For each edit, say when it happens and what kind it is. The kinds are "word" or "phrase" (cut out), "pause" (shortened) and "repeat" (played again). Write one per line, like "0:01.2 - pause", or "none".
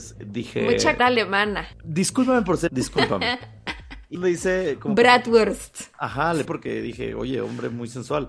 0:01.0 - word
0:02.7 - word
0:04.1 - word
0:06.4 - word